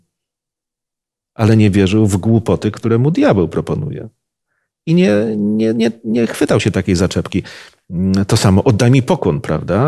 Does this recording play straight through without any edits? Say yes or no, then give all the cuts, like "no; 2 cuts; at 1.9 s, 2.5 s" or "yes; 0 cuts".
yes; 0 cuts